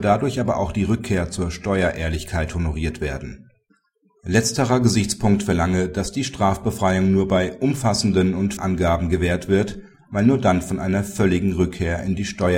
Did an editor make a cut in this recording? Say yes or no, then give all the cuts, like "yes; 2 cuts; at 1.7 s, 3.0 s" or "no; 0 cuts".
yes; 1 cut; at 8.6 s